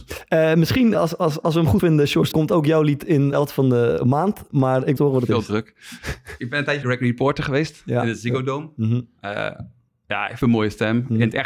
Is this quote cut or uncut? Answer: cut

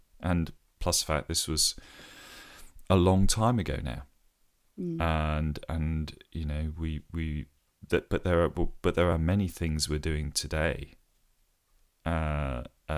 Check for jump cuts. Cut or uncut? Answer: uncut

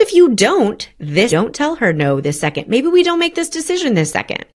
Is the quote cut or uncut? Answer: cut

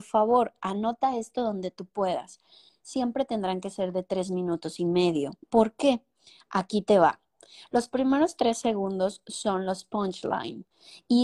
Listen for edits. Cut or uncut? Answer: cut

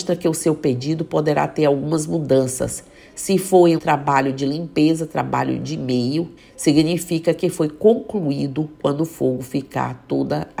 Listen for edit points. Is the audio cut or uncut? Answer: cut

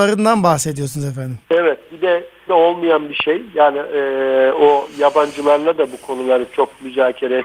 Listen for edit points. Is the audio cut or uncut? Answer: cut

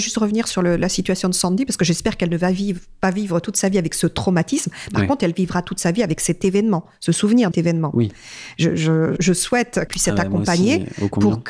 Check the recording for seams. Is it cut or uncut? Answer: cut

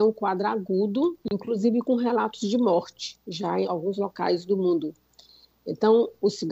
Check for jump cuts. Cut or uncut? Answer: cut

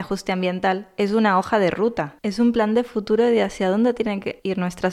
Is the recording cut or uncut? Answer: uncut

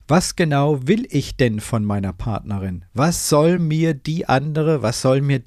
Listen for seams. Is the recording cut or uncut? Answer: uncut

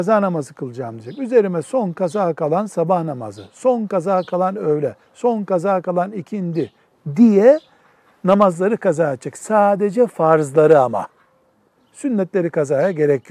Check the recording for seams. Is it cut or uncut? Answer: uncut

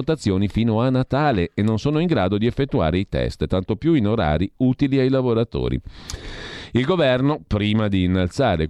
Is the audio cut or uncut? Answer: uncut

